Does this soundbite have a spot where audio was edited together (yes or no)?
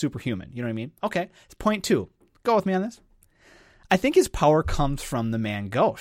no